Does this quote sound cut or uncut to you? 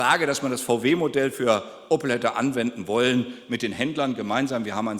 uncut